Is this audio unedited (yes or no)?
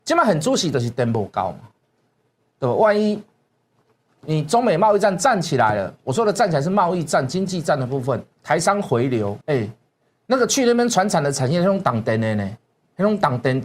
no